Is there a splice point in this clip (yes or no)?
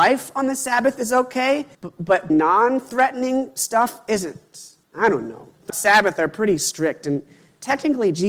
yes